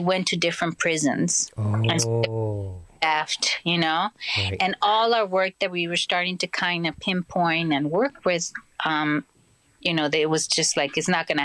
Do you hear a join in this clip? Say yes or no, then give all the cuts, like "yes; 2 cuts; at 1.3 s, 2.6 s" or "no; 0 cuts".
no; 0 cuts